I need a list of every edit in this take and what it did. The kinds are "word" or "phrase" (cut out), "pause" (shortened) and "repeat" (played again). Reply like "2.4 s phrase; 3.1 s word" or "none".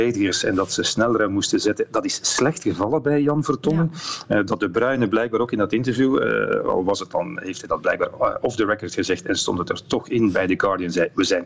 none